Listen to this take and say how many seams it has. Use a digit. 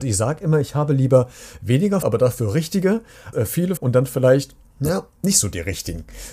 4